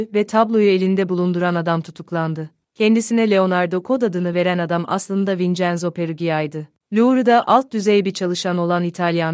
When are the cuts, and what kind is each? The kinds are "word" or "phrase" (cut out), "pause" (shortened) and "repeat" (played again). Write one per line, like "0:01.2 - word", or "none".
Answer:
none

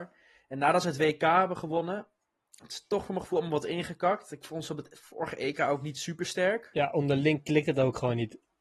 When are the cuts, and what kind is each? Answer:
none

